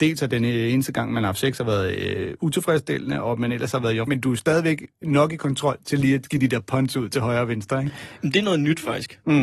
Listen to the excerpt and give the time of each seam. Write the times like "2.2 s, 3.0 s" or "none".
4.1 s